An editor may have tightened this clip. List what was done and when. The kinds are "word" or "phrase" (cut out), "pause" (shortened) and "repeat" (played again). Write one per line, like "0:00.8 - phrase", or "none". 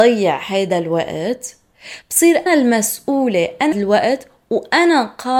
0:02.5 - word
0:03.7 - phrase

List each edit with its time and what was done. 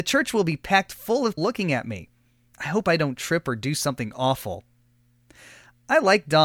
0:01.4 - word

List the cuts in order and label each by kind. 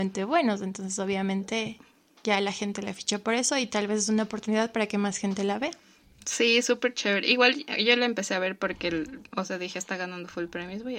none

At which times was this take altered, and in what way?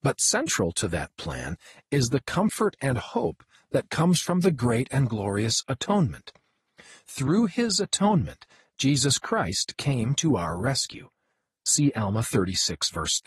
none

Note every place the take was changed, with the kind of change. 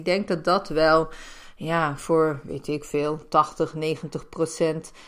none

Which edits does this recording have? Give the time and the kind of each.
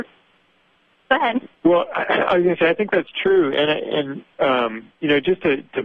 0:01.5 - pause

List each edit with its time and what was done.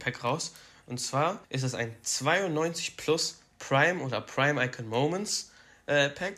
0:01.4 - pause

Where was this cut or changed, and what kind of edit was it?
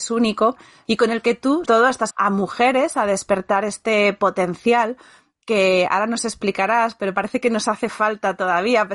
0:01.6 - word
0:02.1 - word

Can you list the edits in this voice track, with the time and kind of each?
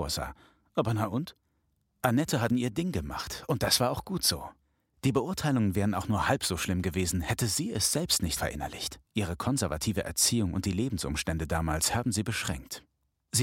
0:02.5 - word
0:08.4 - word
0:09.1 - pause

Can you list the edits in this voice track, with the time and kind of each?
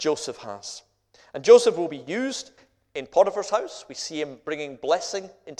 none

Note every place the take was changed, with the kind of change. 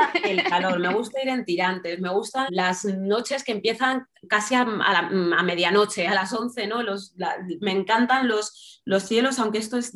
0:02.5 - word

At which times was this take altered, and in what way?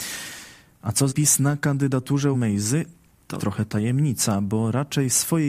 0:01.1 - word
0:02.3 - word
0:03.4 - word

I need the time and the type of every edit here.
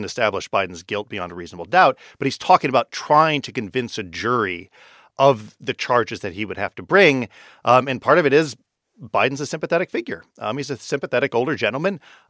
none

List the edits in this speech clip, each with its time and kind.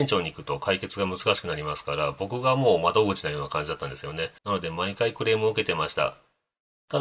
0:04.4 - pause

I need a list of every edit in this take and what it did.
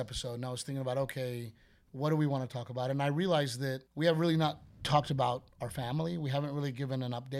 0:03.9 - pause

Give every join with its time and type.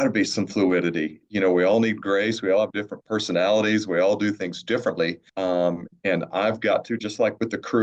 0:05.3 - pause

